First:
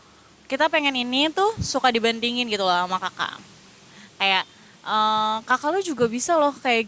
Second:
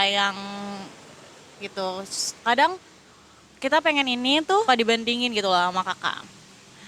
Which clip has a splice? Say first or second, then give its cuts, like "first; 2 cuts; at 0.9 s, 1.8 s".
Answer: second; 3 cuts; at 1.5 s, 2.4 s, 4.7 s